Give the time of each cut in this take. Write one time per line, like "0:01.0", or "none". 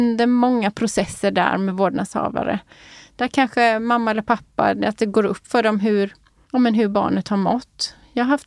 none